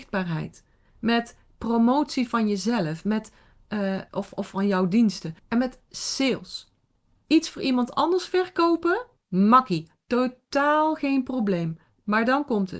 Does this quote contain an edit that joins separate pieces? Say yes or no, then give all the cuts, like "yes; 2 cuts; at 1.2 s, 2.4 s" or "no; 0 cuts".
yes; 4 cuts; at 4.1 s, 5.4 s, 6.9 s, 9.2 s